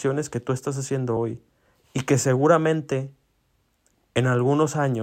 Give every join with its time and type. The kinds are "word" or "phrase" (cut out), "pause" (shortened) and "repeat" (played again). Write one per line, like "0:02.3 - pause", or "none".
none